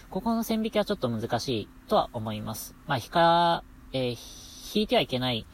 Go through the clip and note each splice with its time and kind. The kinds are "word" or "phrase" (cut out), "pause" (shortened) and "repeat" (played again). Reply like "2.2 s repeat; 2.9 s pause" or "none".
none